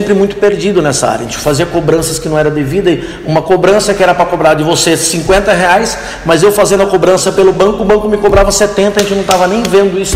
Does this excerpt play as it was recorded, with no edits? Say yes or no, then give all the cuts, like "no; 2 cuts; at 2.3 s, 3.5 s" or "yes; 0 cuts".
yes; 0 cuts